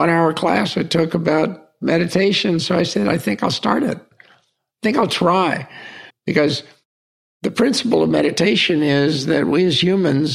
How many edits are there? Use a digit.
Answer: 1